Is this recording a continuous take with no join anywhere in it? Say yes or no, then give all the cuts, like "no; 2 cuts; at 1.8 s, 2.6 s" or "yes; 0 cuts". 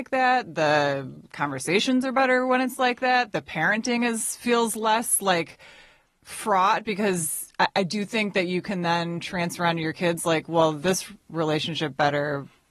yes; 0 cuts